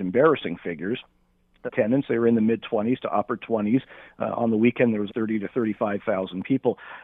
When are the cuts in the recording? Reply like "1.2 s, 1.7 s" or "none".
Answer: 1.7 s, 5.1 s